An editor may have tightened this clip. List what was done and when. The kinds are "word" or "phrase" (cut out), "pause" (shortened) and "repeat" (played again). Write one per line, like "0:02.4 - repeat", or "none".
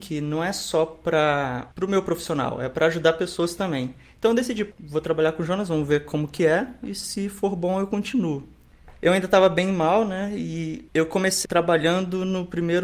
0:11.4 - word